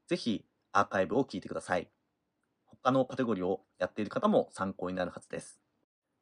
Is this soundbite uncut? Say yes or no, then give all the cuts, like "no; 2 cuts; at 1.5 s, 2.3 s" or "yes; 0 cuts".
yes; 0 cuts